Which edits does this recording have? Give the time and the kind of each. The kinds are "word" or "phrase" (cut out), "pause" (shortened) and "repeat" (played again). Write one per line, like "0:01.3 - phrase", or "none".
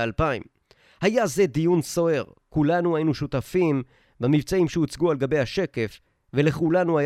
none